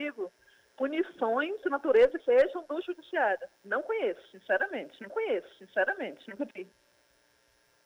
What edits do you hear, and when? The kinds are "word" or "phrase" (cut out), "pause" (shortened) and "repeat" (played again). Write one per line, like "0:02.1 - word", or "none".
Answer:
0:01.6 - word
0:02.2 - phrase
0:03.5 - pause
0:05.1 - repeat